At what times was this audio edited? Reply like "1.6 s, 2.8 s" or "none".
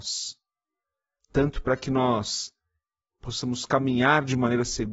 none